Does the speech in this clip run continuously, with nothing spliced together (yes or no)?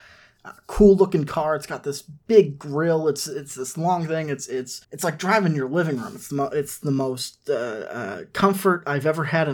no